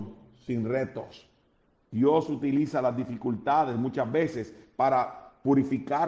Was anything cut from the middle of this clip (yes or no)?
no